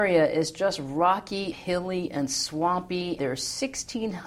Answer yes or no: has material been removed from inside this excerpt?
yes